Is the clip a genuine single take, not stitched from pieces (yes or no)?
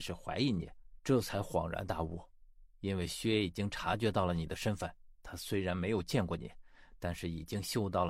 no